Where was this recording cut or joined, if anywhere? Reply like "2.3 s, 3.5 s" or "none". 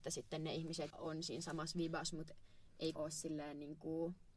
0.9 s, 3.0 s